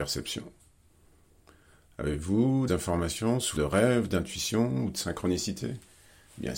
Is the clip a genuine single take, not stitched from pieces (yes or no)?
no